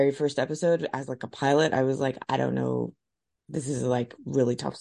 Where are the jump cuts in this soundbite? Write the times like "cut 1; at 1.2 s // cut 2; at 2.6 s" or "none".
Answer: none